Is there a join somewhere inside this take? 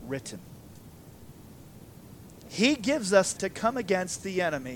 yes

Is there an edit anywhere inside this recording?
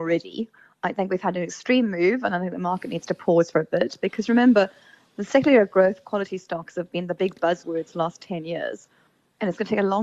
no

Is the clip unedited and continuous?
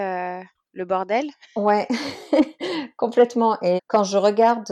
no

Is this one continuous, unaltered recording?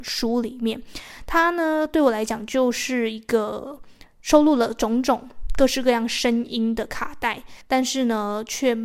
no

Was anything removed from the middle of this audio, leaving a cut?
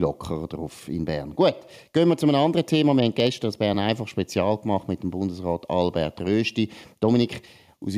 no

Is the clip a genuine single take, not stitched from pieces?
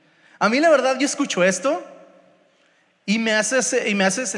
yes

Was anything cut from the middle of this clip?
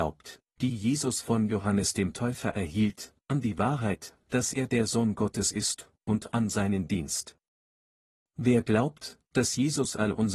no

